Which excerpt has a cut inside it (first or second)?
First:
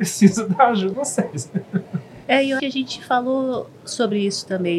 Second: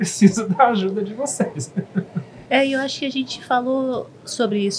first